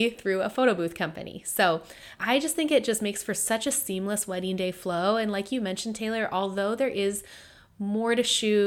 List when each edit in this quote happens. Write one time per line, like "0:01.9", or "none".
0:02.2